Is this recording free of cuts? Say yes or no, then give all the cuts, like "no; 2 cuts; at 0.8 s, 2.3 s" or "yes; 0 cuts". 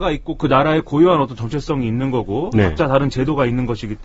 yes; 0 cuts